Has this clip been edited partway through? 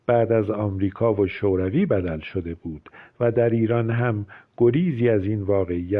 no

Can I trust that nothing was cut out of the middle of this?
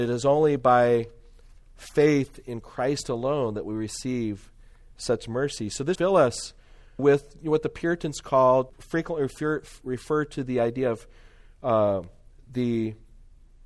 no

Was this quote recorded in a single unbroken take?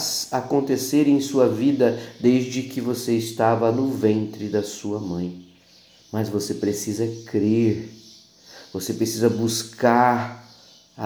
yes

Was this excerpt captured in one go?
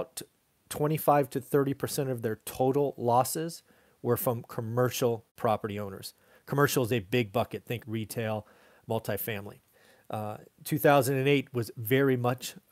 no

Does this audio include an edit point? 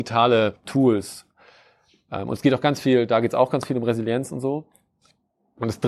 no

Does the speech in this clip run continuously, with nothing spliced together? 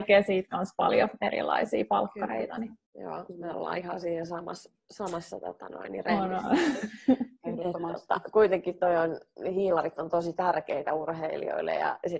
no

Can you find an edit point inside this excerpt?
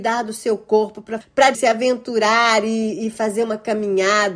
yes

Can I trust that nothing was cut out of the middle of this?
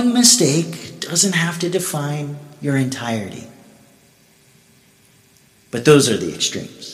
yes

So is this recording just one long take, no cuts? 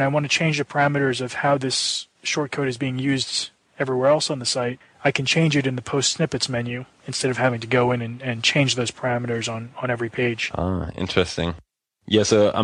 no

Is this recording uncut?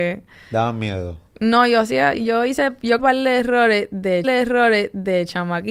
no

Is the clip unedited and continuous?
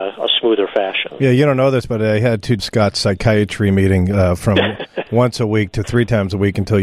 no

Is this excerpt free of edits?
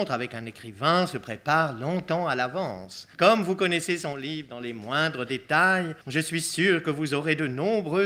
no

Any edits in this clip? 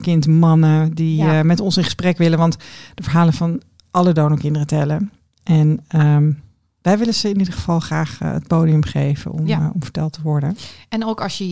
no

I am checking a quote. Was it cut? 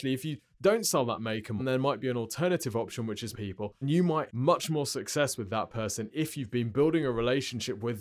yes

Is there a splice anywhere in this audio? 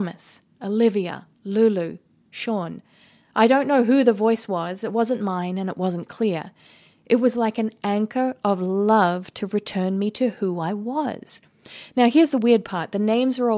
no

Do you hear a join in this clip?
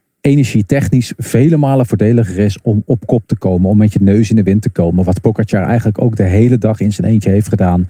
no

